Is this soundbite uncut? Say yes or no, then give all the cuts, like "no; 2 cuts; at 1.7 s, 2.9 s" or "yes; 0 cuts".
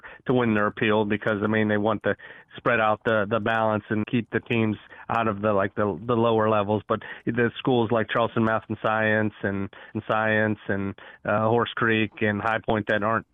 no; 2 cuts; at 4.0 s, 9.9 s